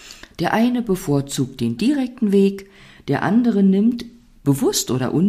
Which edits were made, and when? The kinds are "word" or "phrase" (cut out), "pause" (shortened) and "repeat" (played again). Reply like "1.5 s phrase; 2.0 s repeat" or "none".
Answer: none

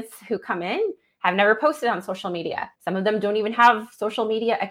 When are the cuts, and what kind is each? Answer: 2.7 s pause

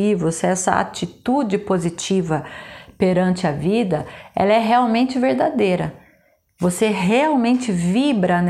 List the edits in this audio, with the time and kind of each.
none

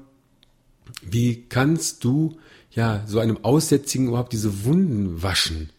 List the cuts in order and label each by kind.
none

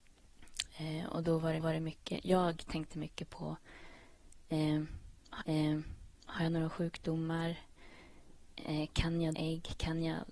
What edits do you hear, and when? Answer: 1.6 s repeat; 5.4 s repeat; 9.3 s word

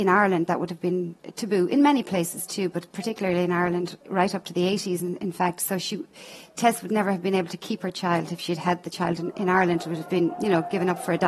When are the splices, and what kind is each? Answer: 4.0 s pause

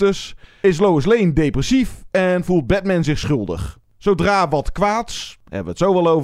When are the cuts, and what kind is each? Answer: none

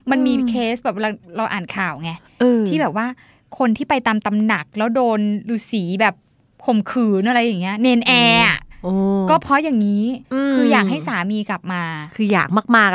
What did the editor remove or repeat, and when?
10.2 s pause

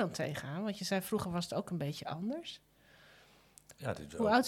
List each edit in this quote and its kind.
none

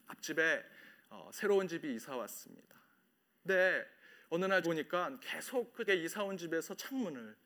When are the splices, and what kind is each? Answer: 4.6 s word; 5.9 s word

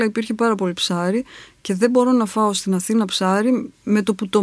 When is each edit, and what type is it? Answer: none

